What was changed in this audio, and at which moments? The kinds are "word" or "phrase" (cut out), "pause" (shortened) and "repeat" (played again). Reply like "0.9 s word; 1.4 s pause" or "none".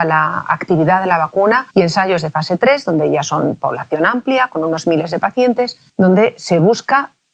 1.7 s pause; 5.9 s pause